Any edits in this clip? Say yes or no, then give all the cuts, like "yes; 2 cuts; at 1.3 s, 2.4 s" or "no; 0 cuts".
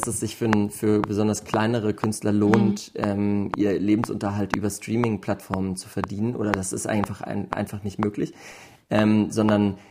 no; 0 cuts